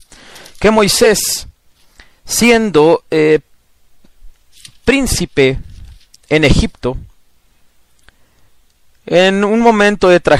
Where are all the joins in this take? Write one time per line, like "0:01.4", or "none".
none